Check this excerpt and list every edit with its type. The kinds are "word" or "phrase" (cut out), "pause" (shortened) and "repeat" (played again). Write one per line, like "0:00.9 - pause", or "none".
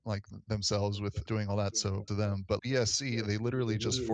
0:01.3 - word
0:02.1 - word
0:02.6 - word